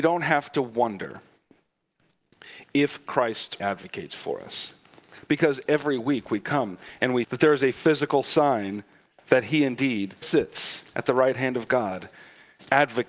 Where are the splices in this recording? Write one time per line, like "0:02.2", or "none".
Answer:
0:03.6
0:07.2
0:10.2